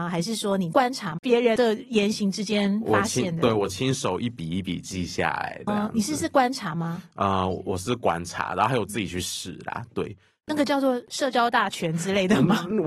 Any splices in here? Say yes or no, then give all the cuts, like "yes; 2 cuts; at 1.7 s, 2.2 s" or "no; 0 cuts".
yes; 1 cut; at 5.7 s